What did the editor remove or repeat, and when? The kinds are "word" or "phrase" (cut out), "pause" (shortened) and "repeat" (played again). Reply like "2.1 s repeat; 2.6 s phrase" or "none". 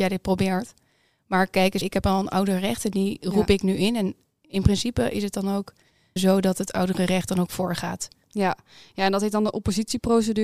1.8 s word; 6.2 s word